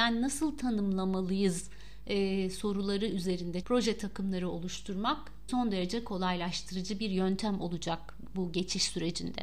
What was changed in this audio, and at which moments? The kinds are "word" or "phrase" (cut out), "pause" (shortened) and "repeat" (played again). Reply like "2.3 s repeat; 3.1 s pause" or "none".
3.6 s word; 5.5 s word